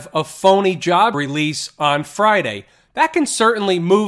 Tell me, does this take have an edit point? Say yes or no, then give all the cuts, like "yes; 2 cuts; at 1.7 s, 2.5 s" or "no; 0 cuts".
yes; 1 cut; at 1.1 s